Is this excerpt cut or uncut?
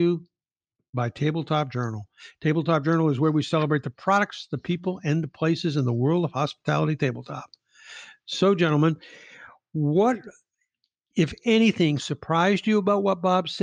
uncut